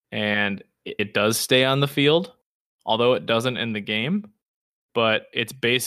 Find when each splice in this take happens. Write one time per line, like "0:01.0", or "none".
0:01.0